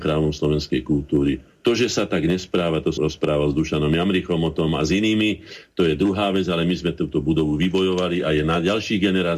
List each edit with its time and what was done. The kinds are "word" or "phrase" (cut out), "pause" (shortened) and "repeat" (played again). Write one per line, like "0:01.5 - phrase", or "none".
0:03.0 - word